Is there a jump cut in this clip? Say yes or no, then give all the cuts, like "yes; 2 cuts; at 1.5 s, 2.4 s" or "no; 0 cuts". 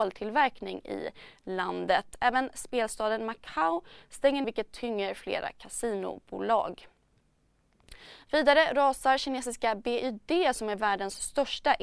yes; 1 cut; at 4.4 s